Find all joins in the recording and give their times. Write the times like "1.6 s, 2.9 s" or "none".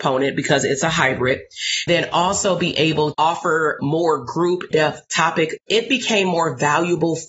1.9 s, 3.1 s, 3.8 s, 4.7 s, 5.6 s